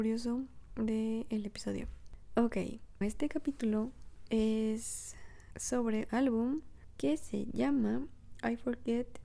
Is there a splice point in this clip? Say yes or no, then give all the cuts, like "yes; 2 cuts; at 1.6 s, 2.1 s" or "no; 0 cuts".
yes; 2 cuts; at 3.0 s, 6.1 s